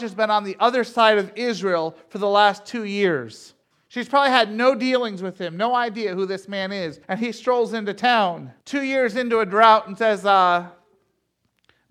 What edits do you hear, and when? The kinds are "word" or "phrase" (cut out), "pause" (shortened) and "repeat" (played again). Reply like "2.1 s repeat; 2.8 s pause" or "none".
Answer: 3.6 s pause; 7.0 s pause; 8.6 s pause

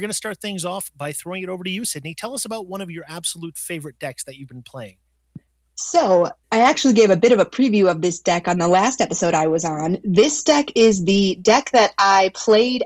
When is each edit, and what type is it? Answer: 6.4 s pause

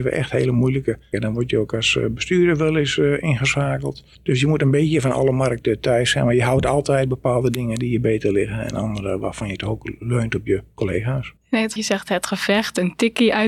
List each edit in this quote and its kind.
1.1 s word; 4.1 s pause; 11.4 s pause; 11.8 s phrase

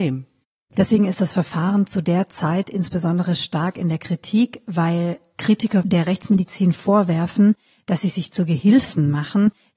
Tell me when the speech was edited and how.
none

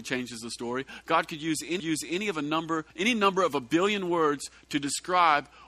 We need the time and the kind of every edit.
1.8 s repeat; 2.9 s pause

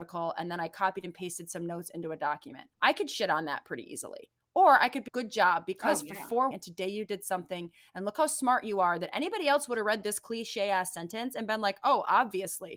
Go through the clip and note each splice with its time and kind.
2.7 s pause; 5.1 s word; 6.5 s phrase

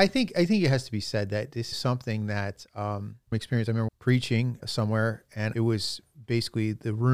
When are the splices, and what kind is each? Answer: 1.7 s phrase; 3.3 s phrase; 3.9 s word; 4.6 s word; 5.5 s phrase

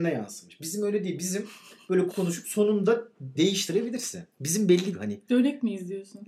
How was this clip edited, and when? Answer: 2.1 s word; 3.4 s word; 4.3 s pause; 4.9 s phrase

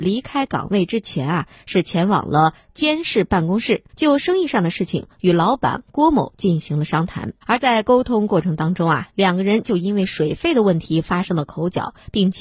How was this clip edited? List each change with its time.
3.9 s pause; 7.4 s pause

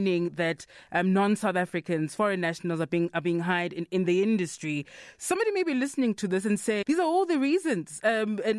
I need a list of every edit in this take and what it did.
6.8 s word

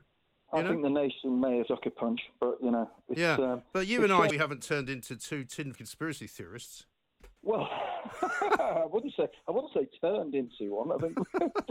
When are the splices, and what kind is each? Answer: 1.7 s phrase; 4.3 s phrase; 5.7 s phrase; 7.4 s pause

